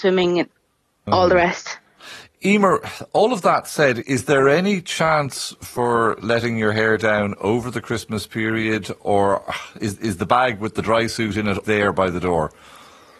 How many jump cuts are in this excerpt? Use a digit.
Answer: 4